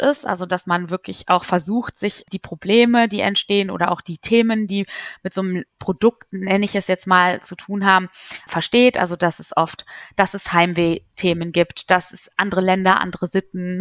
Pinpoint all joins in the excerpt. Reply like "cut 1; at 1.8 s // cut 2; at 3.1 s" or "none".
cut 1; at 5.7 s